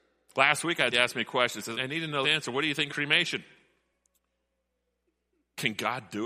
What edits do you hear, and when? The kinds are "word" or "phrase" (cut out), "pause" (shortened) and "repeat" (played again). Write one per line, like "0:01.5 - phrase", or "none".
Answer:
0:00.9 - word
0:01.7 - word
0:02.2 - word
0:02.9 - word

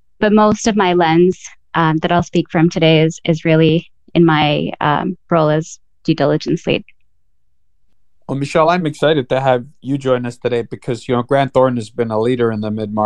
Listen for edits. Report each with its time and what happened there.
none

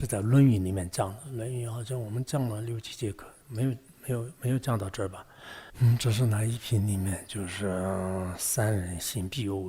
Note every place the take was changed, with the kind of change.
0:05.7 - pause

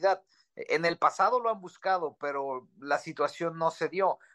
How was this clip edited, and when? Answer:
none

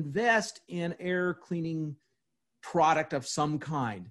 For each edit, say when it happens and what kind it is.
0:01.0 - word

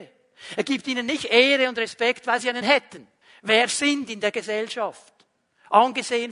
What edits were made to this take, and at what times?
0:02.6 - word
0:03.2 - pause

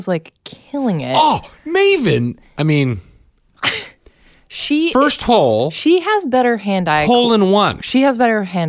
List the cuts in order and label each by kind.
0:01.6 - pause

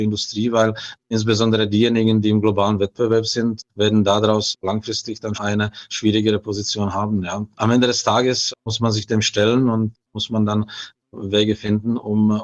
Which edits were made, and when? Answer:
0:01.0 - pause
0:05.3 - word
0:08.6 - pause

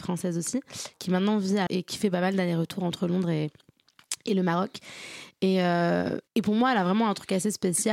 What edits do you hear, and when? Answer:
0:01.7 - word
0:06.3 - pause

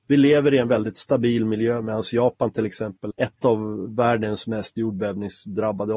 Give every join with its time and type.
0:03.1 - word

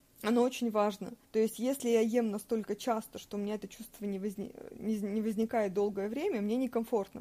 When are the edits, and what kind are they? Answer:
0:01.2 - pause

